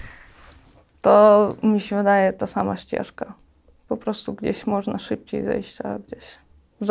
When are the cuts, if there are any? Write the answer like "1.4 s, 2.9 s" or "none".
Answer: none